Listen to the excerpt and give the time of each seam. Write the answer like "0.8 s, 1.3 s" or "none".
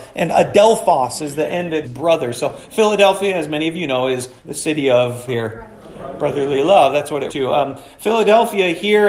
1.8 s, 4.4 s, 5.3 s, 7.3 s